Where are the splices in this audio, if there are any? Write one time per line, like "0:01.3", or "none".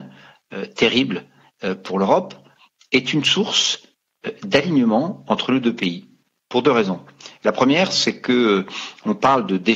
none